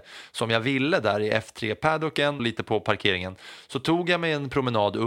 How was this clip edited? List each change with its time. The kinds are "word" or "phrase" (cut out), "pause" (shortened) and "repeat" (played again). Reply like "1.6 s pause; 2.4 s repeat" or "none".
2.4 s word